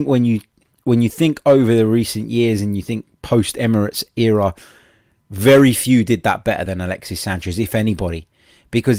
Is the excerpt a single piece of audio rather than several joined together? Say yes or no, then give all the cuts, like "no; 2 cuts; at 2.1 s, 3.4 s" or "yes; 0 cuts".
yes; 0 cuts